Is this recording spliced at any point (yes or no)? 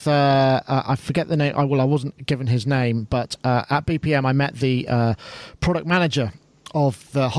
no